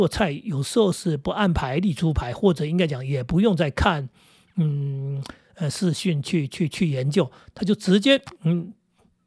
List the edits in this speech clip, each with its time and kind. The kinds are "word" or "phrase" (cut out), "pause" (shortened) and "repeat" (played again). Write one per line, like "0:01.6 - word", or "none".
none

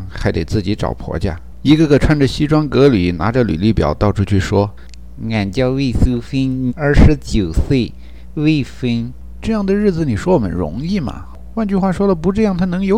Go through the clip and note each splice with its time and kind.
0:06.7 - word

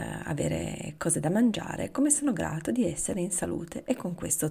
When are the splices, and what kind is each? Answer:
none

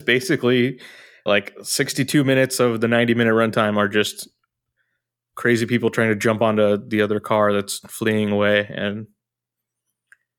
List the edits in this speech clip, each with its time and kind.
0:01.3 - word

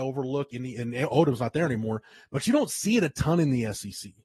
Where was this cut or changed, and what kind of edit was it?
none

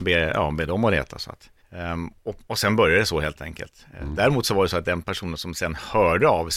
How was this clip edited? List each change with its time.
0:01.6 - pause

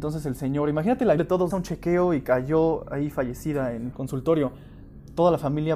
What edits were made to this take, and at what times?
0:01.2 - word
0:01.5 - phrase
0:03.9 - word

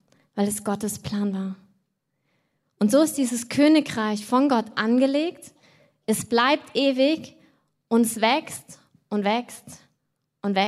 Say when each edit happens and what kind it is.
none

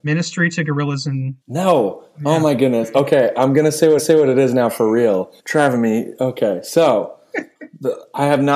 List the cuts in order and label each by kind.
0:01.4 - pause
0:04.0 - repeat
0:05.4 - pause

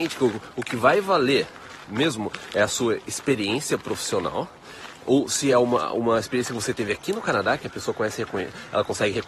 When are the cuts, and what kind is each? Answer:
none

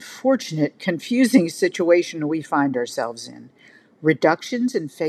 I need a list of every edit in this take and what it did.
none

